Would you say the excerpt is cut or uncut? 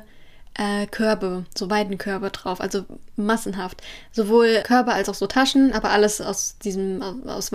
cut